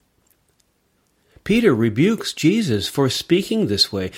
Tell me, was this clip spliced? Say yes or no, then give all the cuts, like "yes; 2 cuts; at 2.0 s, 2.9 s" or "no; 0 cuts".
no; 0 cuts